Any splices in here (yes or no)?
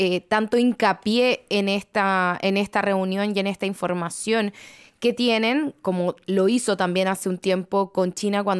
no